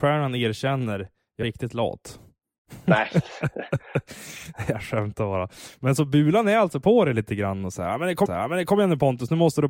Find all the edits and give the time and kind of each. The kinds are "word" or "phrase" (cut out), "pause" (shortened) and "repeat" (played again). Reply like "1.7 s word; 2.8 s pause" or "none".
1.4 s word; 8.3 s repeat